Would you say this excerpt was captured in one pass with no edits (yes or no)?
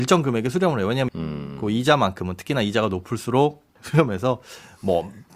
no